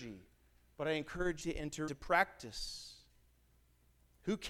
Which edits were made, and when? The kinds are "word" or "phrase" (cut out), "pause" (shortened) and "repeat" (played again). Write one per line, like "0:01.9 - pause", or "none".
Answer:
0:01.4 - word
0:01.9 - word

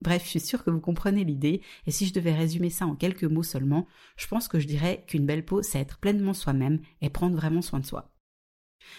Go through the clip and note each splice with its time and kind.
none

